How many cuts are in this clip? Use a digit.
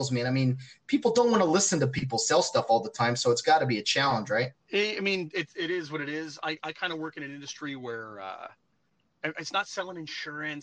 1